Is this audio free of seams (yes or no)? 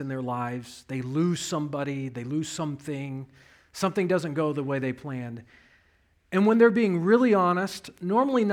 yes